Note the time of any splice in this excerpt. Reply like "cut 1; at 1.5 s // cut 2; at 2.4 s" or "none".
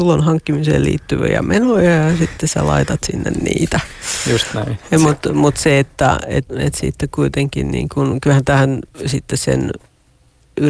cut 1; at 6.5 s